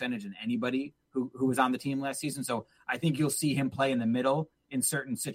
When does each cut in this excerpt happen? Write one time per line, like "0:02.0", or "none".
none